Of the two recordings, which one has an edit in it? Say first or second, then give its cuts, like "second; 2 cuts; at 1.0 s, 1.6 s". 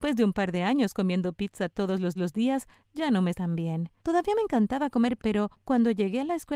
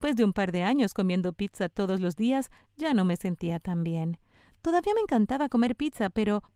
first; 4 cuts; at 2.2 s, 3.3 s, 4.0 s, 5.2 s